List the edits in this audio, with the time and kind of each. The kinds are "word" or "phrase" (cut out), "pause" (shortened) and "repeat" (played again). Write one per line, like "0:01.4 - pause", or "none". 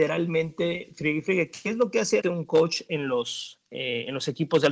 0:02.2 - word